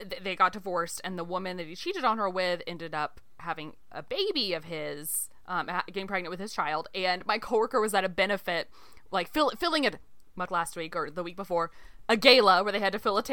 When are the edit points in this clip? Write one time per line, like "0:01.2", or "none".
0:10.5

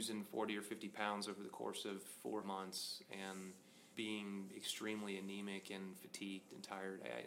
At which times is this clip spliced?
0:02.4
0:03.9

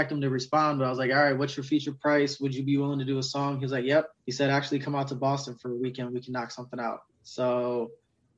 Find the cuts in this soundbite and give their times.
0:04.2
0:07.1

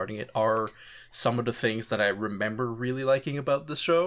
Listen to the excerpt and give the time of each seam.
none

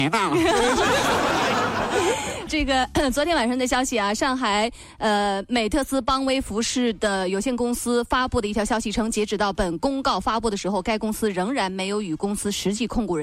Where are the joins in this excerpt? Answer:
0:02.5

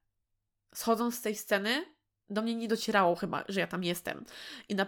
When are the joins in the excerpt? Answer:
none

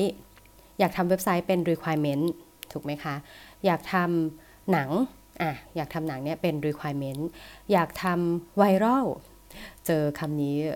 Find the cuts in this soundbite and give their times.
none

